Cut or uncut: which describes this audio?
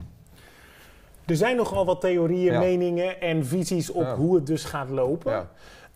uncut